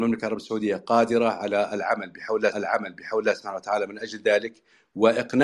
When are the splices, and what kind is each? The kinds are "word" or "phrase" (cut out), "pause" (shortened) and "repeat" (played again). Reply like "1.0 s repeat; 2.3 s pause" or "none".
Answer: 2.5 s repeat